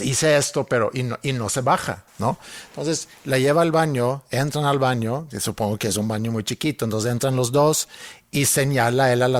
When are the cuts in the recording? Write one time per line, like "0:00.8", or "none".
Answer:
0:02.1